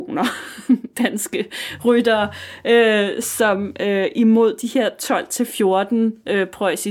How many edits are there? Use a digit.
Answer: 0